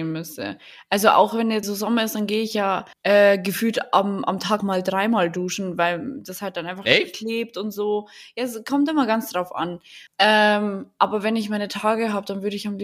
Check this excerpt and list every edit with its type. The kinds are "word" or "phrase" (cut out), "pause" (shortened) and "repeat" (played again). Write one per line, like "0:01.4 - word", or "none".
0:01.6 - word
0:02.9 - pause
0:04.6 - word
0:10.1 - pause